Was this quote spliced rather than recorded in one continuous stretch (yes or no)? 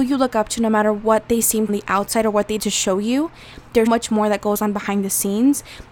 yes